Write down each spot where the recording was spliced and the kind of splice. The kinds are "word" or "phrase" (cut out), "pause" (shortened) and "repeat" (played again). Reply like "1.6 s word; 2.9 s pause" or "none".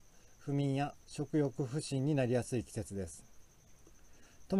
1.0 s pause